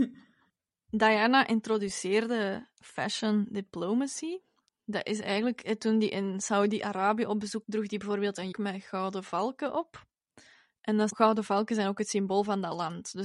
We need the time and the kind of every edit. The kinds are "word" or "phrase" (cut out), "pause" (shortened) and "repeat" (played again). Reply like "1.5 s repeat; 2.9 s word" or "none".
7.6 s word; 8.5 s word; 11.1 s word